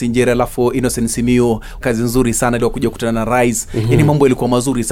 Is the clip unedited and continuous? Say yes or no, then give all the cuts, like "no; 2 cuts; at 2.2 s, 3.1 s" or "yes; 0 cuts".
no; 2 cuts; at 1.8 s, 2.6 s